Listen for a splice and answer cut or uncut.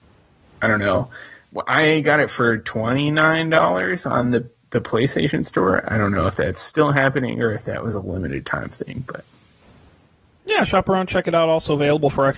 uncut